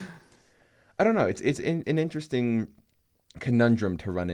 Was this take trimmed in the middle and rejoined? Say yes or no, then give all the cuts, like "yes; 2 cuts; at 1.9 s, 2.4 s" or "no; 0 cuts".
yes; 1 cut; at 1.8 s